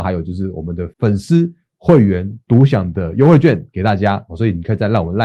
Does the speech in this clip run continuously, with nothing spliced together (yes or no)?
no